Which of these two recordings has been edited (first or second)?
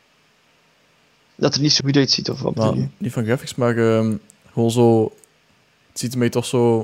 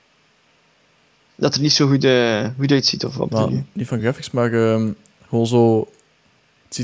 first